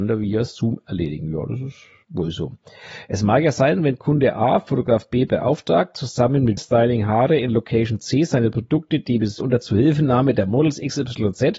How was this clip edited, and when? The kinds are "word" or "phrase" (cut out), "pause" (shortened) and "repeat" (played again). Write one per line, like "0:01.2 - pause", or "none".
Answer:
0:06.6 - word
0:09.4 - word